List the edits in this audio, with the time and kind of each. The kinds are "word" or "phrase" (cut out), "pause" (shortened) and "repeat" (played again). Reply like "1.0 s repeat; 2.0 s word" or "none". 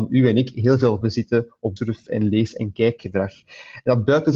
1.0 s word; 1.8 s phrase